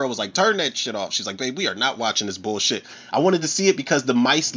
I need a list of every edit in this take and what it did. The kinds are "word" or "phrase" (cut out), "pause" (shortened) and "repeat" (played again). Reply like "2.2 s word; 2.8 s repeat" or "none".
none